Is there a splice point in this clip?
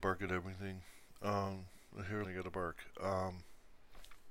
yes; 1 cut; at 2.2 s

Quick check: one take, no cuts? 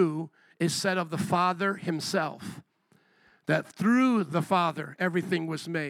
yes; 0 cuts

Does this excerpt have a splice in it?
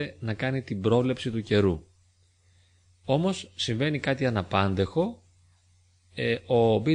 no; 0 cuts

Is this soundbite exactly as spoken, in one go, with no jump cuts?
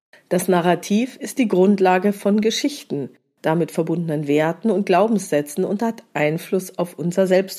yes; 0 cuts

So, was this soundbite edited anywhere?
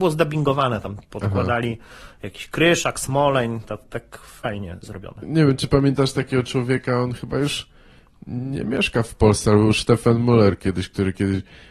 no; 0 cuts

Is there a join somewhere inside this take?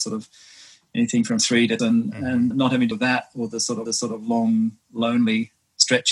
yes; 4 cuts; at 1.8 s, 2.5 s, 2.9 s, 3.9 s

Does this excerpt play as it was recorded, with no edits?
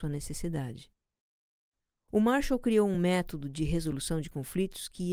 yes; 0 cuts

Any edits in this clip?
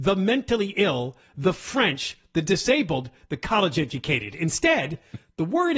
no; 0 cuts

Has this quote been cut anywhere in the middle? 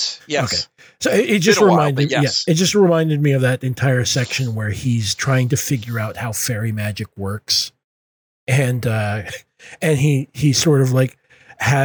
no; 0 cuts

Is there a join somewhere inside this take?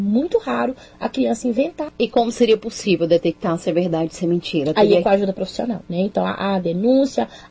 yes; 1 cut; at 5.8 s

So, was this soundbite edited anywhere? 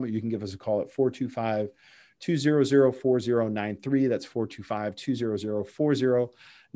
no; 0 cuts

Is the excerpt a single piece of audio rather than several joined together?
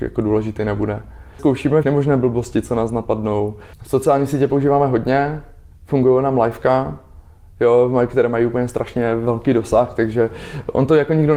no; 2 cuts; at 1.8 s, 3.7 s

